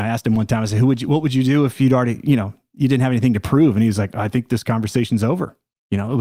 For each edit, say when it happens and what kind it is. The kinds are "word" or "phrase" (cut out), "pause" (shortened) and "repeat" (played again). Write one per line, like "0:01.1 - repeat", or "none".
none